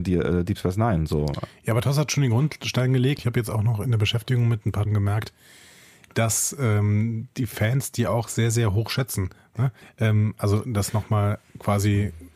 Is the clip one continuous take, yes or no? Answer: no